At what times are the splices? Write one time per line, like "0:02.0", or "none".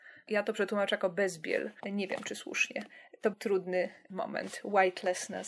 0:01.8
0:03.3